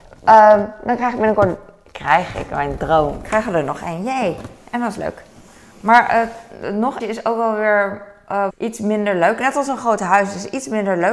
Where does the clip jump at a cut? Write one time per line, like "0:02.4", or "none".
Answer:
0:07.0
0:08.5